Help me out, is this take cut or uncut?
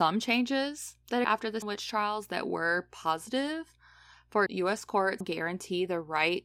cut